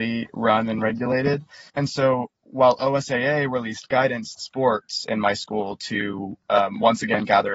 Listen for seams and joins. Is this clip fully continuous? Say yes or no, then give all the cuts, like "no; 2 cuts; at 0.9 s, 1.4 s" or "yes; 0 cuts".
no; 2 cuts; at 1.7 s, 4.4 s